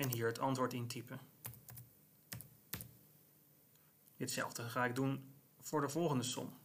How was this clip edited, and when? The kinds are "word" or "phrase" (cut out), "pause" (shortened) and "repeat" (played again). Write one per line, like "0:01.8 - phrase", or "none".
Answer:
none